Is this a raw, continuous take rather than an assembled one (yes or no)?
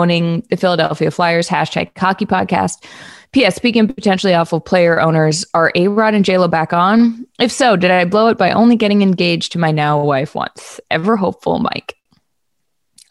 yes